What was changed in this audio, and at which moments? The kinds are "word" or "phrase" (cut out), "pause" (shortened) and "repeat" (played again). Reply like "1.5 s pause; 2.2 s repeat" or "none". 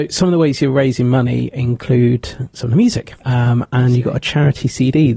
3.2 s pause